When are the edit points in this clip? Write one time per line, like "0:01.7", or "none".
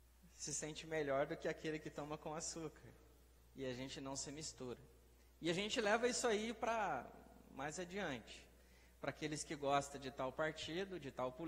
none